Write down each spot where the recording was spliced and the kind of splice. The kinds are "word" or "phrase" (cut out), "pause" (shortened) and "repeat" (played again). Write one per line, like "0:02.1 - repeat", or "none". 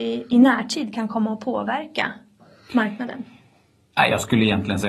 none